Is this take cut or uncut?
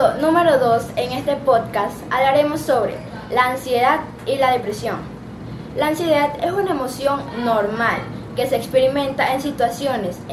uncut